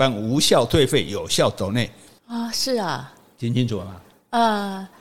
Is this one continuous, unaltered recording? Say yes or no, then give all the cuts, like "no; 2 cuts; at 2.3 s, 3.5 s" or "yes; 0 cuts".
yes; 0 cuts